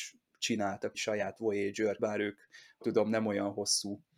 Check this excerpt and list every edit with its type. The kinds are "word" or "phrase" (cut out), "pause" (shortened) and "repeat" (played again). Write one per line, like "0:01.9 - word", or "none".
0:00.9 - word
0:02.0 - word
0:02.8 - word